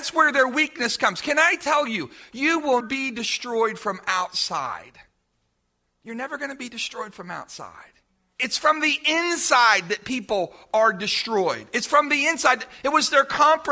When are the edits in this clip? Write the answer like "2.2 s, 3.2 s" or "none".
2.8 s